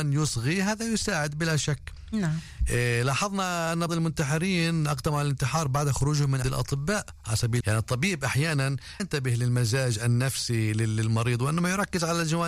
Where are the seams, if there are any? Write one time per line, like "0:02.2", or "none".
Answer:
0:03.9
0:06.4
0:07.6
0:09.0